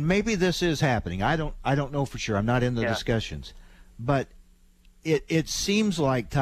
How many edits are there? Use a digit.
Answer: 0